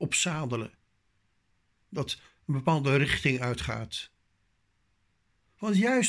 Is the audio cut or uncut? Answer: uncut